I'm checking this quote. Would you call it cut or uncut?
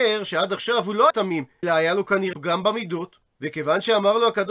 cut